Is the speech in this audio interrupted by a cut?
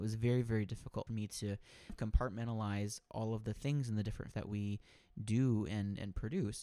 yes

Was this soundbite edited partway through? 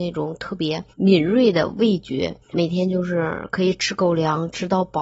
yes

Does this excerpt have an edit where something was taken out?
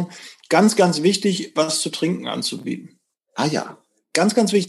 no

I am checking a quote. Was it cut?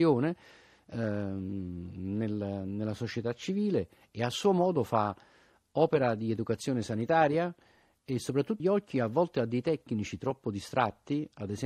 yes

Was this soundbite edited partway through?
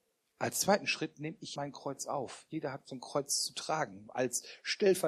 yes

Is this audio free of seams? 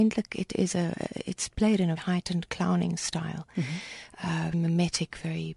no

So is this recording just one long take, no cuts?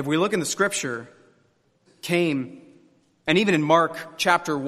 no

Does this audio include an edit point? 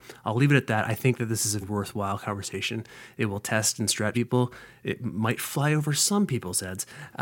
yes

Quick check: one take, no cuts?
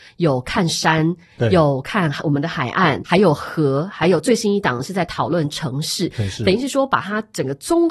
no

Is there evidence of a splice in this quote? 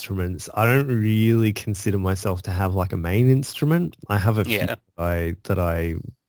no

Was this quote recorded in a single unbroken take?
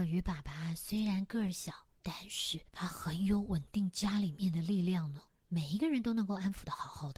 no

